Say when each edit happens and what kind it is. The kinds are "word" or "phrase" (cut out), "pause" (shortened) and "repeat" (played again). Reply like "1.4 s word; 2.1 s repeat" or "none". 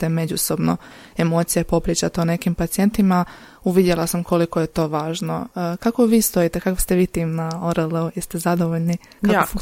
none